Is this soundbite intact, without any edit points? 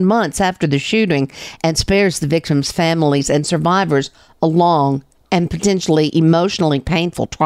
yes; 0 cuts

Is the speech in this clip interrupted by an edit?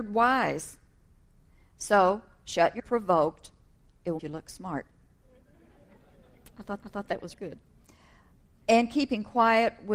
yes; 4 cuts; at 2.8 s, 4.2 s, 6.8 s, 7.3 s

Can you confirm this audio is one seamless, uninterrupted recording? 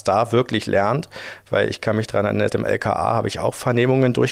no; 1 cut; at 2.5 s

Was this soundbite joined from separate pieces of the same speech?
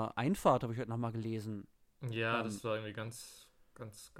no; 0 cuts

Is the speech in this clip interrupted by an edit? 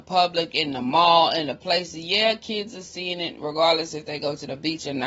no; 0 cuts

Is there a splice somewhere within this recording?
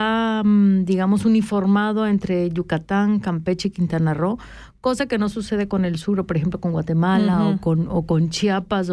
no; 0 cuts

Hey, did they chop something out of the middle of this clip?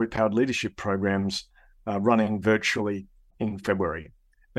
no; 0 cuts

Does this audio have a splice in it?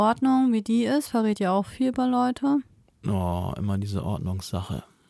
no; 0 cuts

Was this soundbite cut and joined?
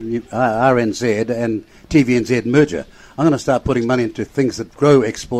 no; 0 cuts

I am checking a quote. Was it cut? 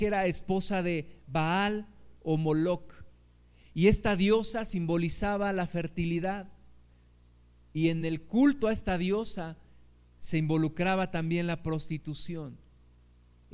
no; 0 cuts

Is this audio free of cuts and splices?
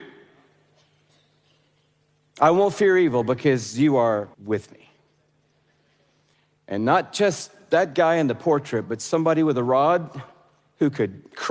no; 1 cut; at 4.3 s

